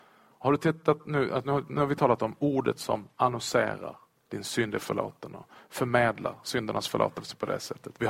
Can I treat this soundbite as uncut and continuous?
yes; 0 cuts

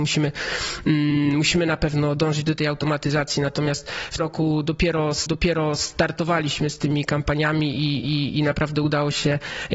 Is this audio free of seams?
no; 3 cuts; at 4.2 s, 5.3 s, 8.0 s

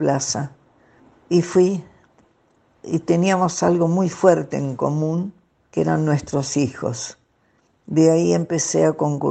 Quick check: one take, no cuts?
yes; 0 cuts

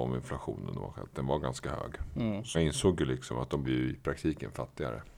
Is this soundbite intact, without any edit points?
no; 2 cuts; at 2.5 s, 3.6 s

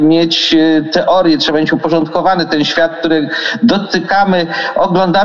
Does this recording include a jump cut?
no; 0 cuts

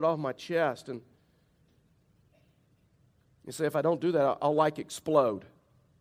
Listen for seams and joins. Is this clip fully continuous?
yes; 0 cuts

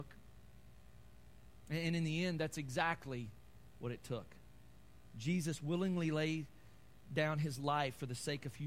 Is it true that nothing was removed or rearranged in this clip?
yes; 0 cuts

